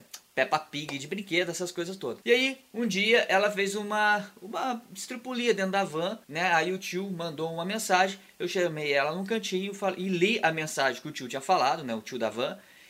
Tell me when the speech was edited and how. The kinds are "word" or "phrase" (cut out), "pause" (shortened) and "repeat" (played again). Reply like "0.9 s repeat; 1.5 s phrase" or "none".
6.2 s pause